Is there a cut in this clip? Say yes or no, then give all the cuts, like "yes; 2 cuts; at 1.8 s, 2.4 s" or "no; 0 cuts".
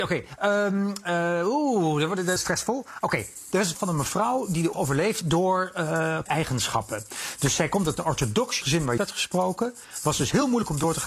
yes; 7 cuts; at 2.4 s, 3.7 s, 4.7 s, 5.2 s, 6.3 s, 8.6 s, 9.0 s